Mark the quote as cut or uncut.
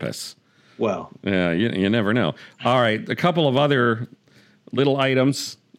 uncut